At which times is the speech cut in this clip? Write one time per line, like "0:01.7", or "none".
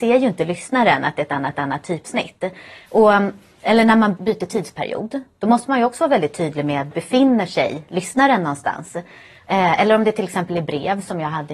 0:01.5
0:04.2
0:06.9